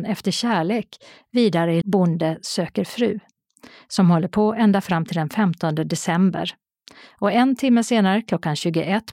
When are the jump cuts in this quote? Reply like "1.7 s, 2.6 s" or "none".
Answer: 1.8 s